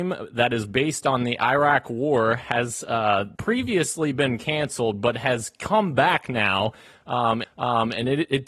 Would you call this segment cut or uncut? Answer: cut